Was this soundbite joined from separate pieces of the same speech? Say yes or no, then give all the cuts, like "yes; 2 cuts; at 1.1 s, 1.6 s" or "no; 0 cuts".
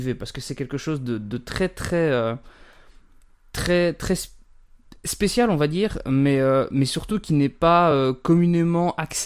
no; 0 cuts